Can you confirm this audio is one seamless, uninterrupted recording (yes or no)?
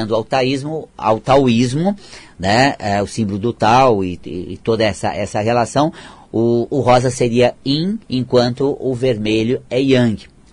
no